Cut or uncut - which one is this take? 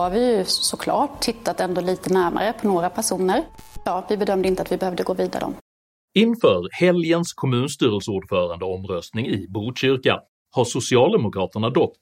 cut